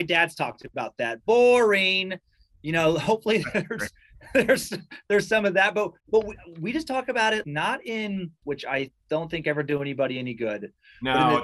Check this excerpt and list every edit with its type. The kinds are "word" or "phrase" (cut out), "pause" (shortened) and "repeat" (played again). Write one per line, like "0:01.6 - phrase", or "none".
0:06.0 - pause
0:07.4 - word
0:08.4 - phrase